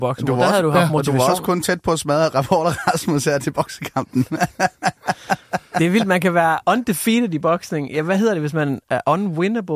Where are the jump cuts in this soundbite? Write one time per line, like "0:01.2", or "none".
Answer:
none